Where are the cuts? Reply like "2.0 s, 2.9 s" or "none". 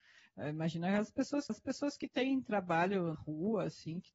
1.5 s, 3.1 s